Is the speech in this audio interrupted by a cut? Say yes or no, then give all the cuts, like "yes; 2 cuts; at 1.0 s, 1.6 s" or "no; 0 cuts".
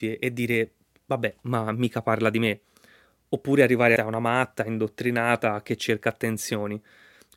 yes; 1 cut; at 4.0 s